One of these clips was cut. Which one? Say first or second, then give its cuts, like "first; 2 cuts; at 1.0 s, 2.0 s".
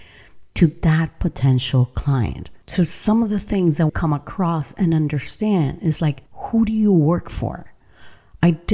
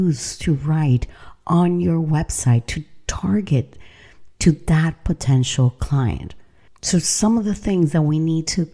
first; 3 cuts; at 2.6 s, 3.9 s, 6.3 s